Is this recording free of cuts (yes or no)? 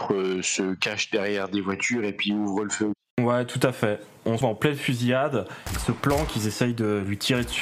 no